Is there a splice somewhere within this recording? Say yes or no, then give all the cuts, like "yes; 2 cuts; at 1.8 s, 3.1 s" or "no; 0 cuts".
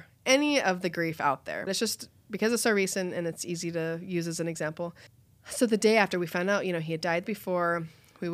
yes; 3 cuts; at 1.7 s, 5.1 s, 7.2 s